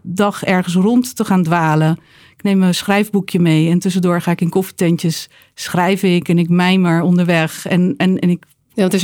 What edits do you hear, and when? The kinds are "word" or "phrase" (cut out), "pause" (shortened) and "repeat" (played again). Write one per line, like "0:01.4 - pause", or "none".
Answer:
0:05.3 - pause